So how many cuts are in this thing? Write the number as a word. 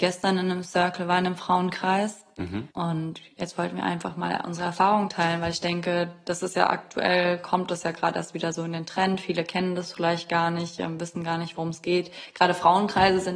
one